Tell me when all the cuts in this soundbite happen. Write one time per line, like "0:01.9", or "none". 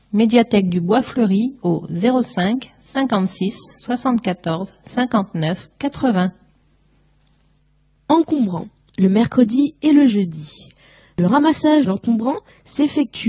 0:11.8